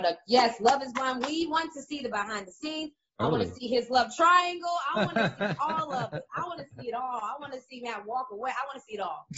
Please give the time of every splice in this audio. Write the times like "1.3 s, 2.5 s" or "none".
none